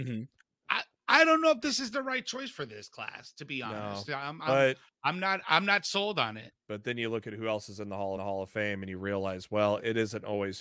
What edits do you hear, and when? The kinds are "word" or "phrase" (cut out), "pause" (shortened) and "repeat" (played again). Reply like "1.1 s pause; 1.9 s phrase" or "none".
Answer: 6.6 s pause; 8.2 s repeat